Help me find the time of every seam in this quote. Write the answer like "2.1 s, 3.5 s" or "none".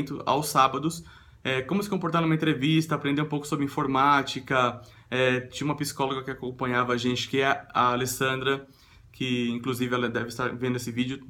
none